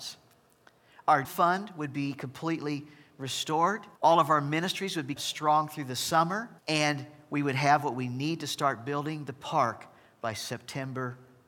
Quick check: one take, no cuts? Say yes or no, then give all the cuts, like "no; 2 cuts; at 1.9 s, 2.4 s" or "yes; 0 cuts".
no; 4 cuts; at 1.2 s, 4.0 s, 5.2 s, 6.6 s